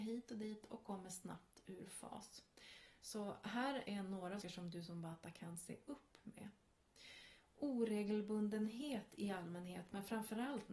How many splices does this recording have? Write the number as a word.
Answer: one